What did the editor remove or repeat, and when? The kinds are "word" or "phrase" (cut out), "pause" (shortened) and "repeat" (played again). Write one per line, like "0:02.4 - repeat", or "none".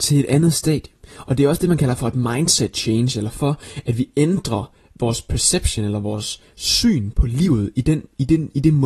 none